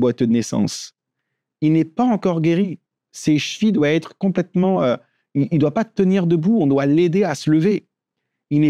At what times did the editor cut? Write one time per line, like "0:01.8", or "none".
none